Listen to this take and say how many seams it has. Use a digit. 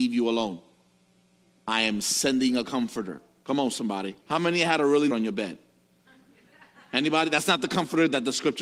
2